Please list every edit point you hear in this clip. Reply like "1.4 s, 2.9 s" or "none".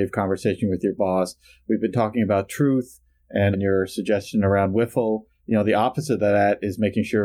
3.5 s